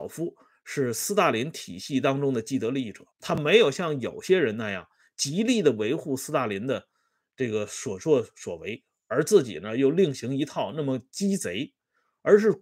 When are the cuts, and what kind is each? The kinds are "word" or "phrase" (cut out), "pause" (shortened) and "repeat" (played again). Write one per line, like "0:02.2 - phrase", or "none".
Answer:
0:03.1 - pause

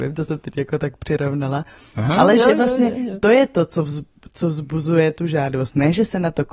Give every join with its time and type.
none

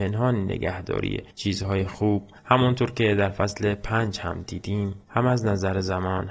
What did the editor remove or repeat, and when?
0:01.3 - pause
0:02.4 - pause
0:05.0 - pause

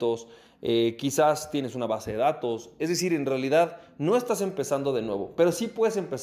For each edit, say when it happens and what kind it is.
none

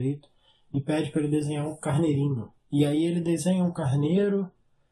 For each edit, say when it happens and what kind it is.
0:02.6 - pause

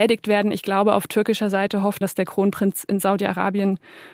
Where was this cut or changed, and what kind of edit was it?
0:02.0 - word

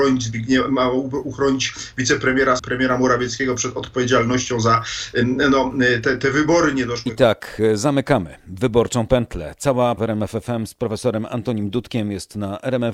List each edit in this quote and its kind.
0:02.6 - phrase
0:10.0 - phrase

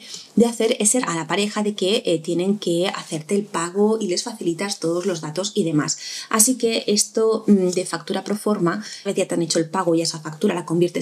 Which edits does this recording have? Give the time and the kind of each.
0:01.0 - phrase
0:09.1 - phrase

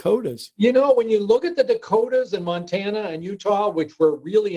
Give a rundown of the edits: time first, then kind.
none

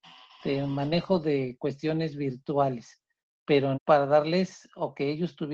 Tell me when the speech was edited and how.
0:03.7 - word

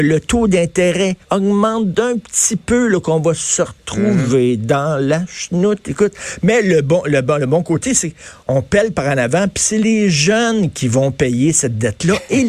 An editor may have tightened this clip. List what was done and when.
0:01.2 - pause
0:08.4 - pause

